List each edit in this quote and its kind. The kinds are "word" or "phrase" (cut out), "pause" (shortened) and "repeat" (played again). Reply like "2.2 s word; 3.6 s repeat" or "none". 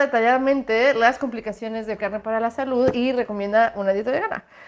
2.0 s word